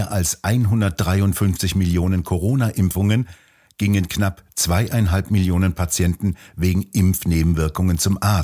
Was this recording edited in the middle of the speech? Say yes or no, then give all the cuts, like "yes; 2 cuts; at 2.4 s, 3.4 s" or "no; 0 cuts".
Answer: no; 0 cuts